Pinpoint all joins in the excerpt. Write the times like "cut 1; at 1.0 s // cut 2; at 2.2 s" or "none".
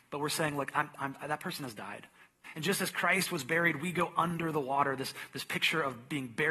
none